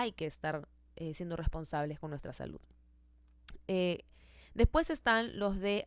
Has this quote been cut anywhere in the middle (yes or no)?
no